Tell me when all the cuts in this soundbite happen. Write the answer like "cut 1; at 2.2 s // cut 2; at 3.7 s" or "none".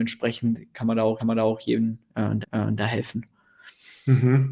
cut 1; at 1.2 s // cut 2; at 2.4 s